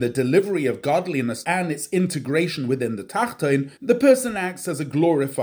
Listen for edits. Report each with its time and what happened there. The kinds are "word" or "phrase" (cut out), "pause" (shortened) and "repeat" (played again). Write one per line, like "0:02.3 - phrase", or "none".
0:01.4 - phrase
0:03.8 - pause